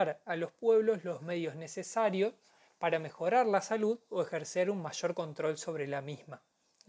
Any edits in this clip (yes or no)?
no